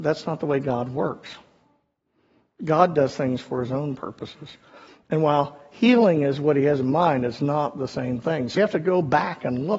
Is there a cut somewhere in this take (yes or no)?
yes